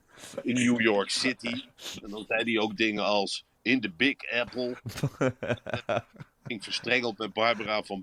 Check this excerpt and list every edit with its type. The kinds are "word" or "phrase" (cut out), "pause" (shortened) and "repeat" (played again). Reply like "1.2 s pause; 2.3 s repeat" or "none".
none